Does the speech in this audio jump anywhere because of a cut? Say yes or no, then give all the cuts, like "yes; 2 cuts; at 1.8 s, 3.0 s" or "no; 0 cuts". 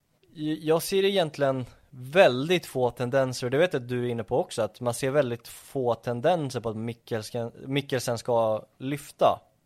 no; 0 cuts